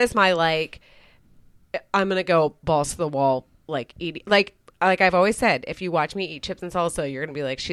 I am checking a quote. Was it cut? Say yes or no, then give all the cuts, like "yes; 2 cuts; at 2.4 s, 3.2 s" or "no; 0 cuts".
no; 0 cuts